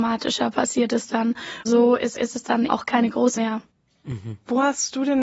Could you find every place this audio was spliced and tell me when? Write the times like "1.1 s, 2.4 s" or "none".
1.7 s, 2.2 s, 2.7 s, 3.4 s